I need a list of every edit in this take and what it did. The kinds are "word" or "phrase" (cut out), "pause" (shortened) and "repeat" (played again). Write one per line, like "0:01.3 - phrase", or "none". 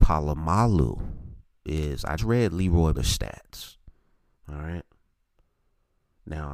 0:01.7 - word
0:02.2 - word
0:02.9 - word